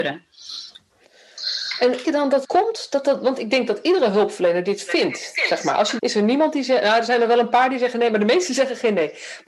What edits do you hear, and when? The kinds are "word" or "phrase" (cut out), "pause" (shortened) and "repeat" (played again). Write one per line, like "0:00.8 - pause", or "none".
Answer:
0:02.0 - phrase
0:02.4 - word
0:06.0 - phrase